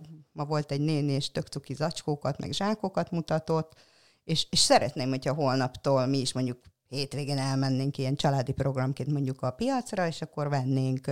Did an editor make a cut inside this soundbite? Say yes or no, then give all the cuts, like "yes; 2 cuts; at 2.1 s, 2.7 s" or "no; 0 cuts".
no; 0 cuts